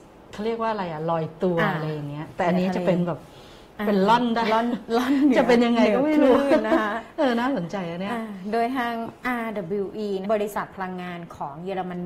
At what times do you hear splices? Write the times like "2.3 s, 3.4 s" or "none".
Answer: 10.2 s